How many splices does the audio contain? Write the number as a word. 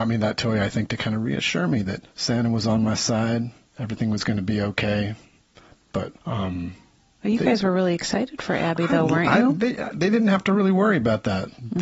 three